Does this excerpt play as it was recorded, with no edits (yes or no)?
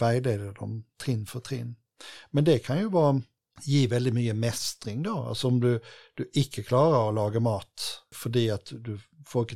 yes